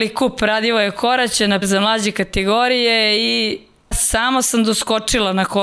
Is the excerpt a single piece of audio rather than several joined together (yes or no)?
no